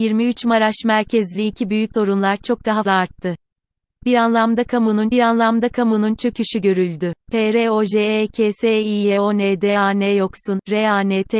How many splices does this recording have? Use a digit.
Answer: 4